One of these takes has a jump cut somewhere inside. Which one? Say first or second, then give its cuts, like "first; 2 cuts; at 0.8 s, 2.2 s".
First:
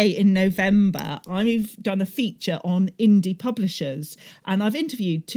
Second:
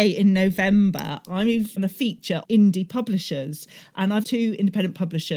second; 3 cuts; at 1.8 s, 2.4 s, 4.2 s